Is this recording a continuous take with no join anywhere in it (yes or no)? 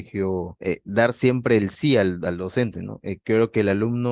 yes